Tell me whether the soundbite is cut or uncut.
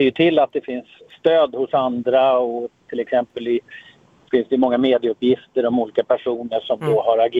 uncut